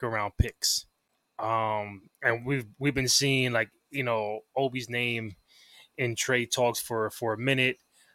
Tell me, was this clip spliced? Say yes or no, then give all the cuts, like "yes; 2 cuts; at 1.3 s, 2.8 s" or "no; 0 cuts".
no; 0 cuts